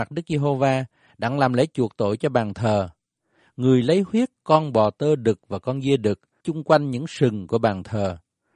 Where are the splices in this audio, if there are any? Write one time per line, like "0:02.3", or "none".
0:06.4